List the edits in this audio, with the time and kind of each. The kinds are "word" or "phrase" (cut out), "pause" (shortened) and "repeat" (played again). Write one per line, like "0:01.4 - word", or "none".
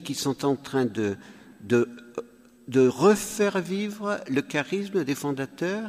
none